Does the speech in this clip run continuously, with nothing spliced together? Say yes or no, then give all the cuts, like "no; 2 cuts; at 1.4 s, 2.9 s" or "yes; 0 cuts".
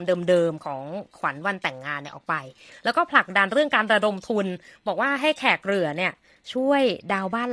yes; 0 cuts